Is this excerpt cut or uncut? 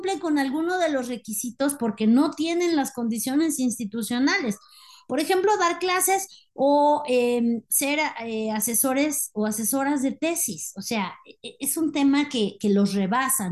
uncut